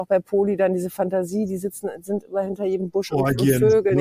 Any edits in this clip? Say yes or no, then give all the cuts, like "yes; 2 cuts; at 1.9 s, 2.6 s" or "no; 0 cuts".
no; 0 cuts